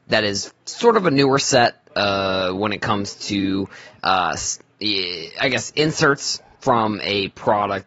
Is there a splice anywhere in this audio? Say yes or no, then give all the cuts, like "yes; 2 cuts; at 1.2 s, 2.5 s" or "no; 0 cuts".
no; 0 cuts